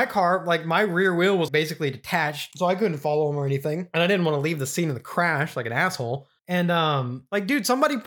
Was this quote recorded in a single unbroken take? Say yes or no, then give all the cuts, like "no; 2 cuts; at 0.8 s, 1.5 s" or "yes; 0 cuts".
no; 2 cuts; at 1.5 s, 6.4 s